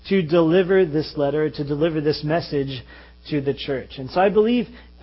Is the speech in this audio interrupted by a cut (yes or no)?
no